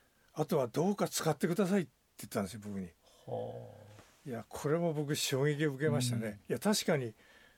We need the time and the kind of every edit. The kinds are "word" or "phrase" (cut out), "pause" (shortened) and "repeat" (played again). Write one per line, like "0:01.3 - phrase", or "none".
none